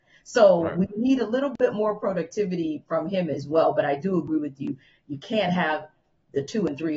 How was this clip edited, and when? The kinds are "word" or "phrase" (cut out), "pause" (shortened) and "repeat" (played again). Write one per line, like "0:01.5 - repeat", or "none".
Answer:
none